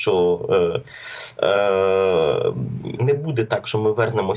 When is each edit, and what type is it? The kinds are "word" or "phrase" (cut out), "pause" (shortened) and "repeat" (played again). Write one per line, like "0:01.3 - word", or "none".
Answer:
0:03.0 - word